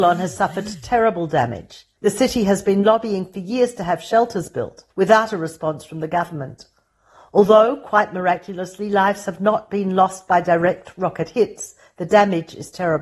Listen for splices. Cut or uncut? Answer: cut